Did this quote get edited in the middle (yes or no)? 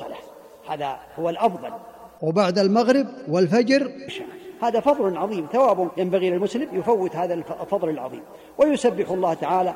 yes